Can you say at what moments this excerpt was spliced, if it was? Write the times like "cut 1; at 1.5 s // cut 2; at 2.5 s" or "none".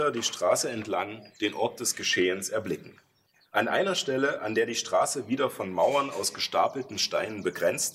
cut 1; at 3.3 s